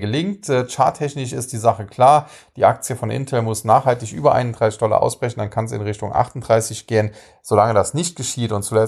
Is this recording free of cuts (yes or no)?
yes